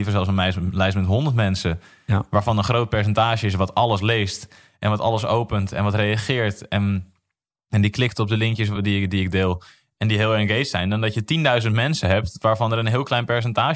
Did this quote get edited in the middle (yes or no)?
no